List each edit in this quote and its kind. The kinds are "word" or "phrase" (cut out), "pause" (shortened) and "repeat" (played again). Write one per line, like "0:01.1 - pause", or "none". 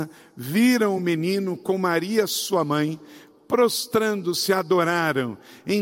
none